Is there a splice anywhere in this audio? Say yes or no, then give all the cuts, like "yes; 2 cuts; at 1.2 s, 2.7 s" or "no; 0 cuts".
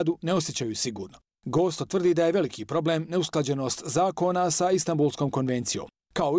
no; 0 cuts